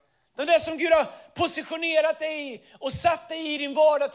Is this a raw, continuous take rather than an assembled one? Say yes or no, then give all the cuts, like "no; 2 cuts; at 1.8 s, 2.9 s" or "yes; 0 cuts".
yes; 0 cuts